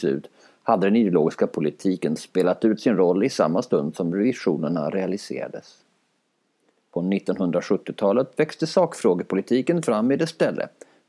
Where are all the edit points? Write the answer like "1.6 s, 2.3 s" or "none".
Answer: none